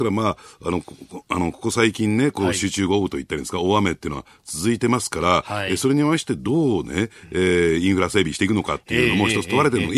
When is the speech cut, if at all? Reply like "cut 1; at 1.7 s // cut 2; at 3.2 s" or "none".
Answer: none